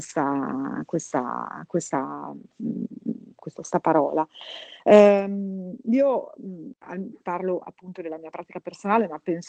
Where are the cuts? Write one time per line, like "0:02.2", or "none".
0:03.5